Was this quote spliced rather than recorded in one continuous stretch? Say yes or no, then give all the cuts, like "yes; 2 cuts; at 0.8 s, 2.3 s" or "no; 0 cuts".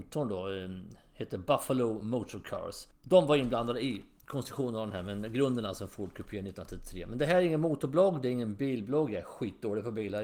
no; 0 cuts